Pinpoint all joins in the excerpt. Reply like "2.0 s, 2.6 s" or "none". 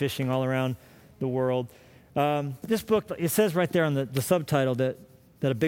2.6 s